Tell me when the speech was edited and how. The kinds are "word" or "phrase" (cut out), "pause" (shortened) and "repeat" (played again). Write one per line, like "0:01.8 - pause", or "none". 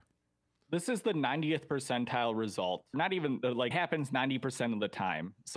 0:02.9 - word
0:03.7 - word

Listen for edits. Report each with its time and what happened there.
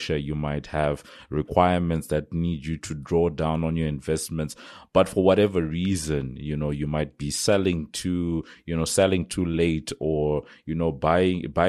0:02.8 - word

